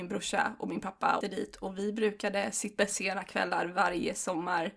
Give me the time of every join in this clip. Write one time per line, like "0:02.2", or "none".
0:01.2
0:02.8